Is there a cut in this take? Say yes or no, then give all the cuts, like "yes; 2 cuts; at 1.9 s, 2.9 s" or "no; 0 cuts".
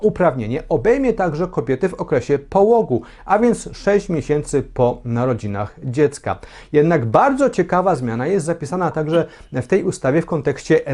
no; 0 cuts